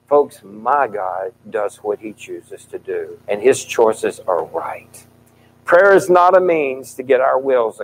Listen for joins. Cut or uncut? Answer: cut